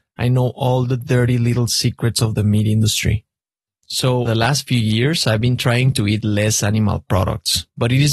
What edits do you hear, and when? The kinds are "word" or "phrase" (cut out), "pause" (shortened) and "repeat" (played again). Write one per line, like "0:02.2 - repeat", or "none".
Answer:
0:04.2 - word

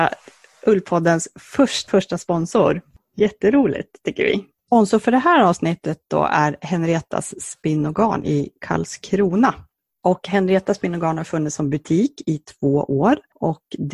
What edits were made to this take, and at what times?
0:01.9 - word

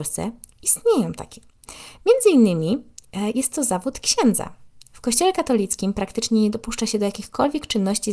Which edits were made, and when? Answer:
none

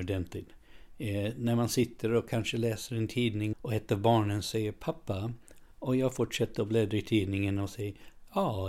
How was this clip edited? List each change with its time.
0:03.5 - word
0:05.7 - pause

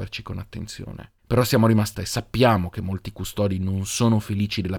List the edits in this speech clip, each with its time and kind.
0:01.2 - pause
0:01.9 - word

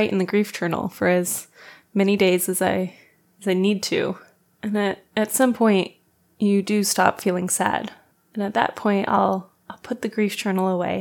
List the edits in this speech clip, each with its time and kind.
none

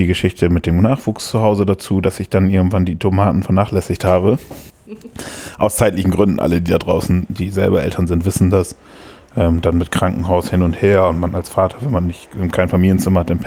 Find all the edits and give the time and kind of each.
0:04.7 - pause

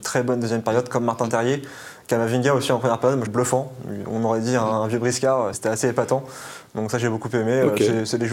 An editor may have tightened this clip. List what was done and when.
0:03.3 - phrase
0:05.5 - word

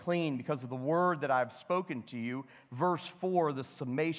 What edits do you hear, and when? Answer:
none

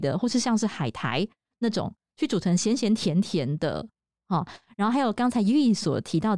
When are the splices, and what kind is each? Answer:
none

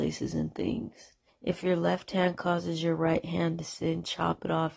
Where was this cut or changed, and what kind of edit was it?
0:01.3 - pause

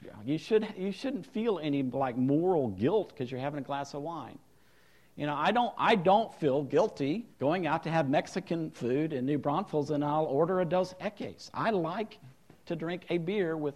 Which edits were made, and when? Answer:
0:07.3 - pause

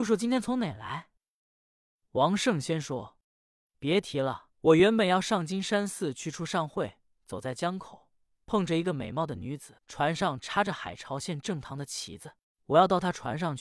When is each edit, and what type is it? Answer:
0:03.2 - pause
0:04.5 - pause
0:09.8 - pause
0:12.4 - pause

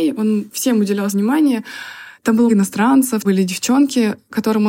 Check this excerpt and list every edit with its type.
0:01.1 - word
0:02.5 - word
0:03.2 - word

